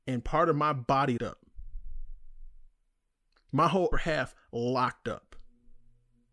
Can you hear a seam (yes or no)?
yes